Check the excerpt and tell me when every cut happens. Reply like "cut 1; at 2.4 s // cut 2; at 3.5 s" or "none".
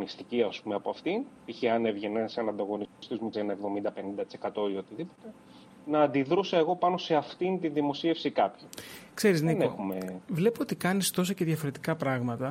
cut 1; at 3.3 s